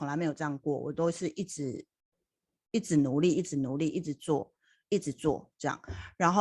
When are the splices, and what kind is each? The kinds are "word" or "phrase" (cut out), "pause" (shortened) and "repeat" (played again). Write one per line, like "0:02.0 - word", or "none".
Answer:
none

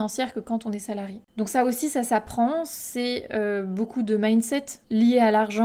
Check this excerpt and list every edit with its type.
0:01.3 - pause

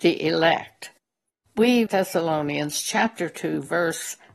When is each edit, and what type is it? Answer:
0:01.9 - phrase

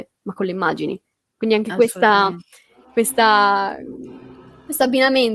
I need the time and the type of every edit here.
none

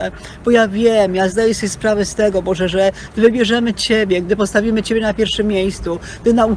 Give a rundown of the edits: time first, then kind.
none

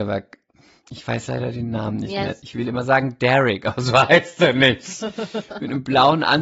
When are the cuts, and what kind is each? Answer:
none

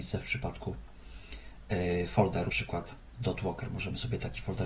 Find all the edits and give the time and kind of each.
0:02.5 - word

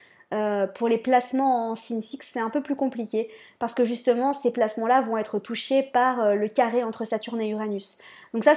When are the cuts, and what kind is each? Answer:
none

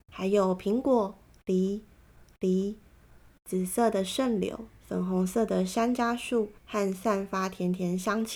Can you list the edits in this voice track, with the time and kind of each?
0:02.3 - repeat
0:04.8 - pause
0:06.6 - pause

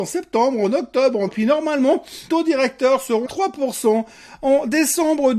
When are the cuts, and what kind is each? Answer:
0:01.3 - word
0:02.3 - word
0:03.2 - word

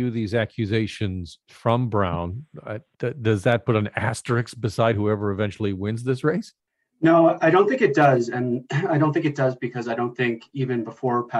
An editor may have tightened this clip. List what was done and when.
0:06.7 - pause

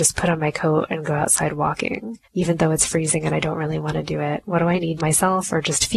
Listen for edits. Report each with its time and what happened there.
0:02.2 - pause
0:05.0 - phrase

